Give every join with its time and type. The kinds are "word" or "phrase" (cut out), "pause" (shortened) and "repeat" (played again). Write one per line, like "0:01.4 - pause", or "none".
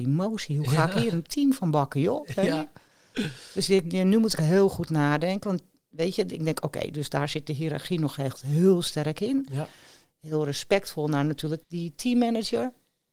0:04.4 - word
0:11.6 - word